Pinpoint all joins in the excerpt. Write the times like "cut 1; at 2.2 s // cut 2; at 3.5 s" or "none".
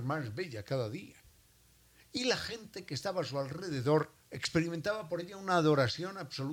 cut 1; at 4.2 s